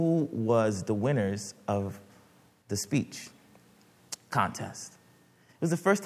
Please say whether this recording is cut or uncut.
uncut